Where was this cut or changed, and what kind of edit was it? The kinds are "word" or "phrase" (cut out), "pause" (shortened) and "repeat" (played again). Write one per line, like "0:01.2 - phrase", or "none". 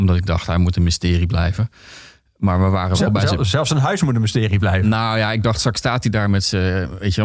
none